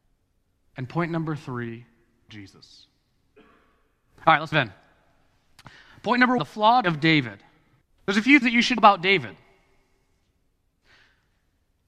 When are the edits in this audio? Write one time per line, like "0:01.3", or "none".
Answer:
0:02.3
0:04.5
0:06.4
0:06.8
0:07.8
0:08.4
0:08.8